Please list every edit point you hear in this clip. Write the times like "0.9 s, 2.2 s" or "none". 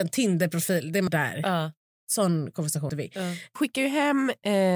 1.1 s, 2.9 s, 3.6 s